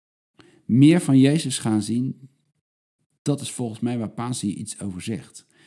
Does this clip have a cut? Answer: no; 0 cuts

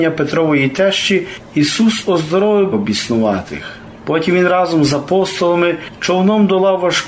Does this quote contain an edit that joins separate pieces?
yes; 1 cut; at 2.7 s

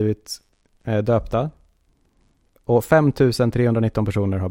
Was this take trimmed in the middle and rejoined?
no; 0 cuts

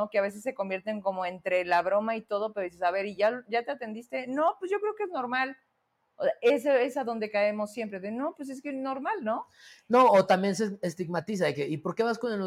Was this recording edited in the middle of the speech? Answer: no; 0 cuts

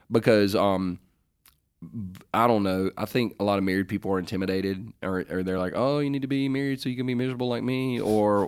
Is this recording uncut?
yes; 0 cuts

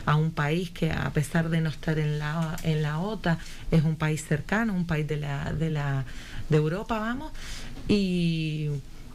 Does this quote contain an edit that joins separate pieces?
no; 0 cuts

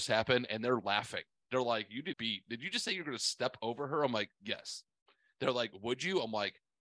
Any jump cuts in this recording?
yes; 2 cuts; at 2.1 s, 4.3 s

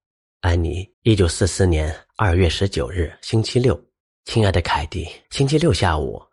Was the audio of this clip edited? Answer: yes; 3 cuts; at 0.9 s, 4.1 s, 5.2 s

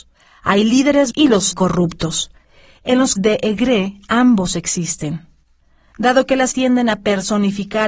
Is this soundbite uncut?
no; 4 cuts; at 1.1 s, 1.5 s, 3.2 s, 6.5 s

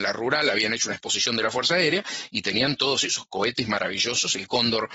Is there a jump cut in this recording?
no; 0 cuts

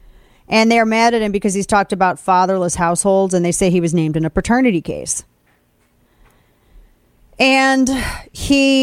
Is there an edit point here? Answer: no; 0 cuts

